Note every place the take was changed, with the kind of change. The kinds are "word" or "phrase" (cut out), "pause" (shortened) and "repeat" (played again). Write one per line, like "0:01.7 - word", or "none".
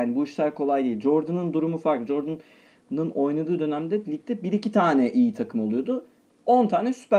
none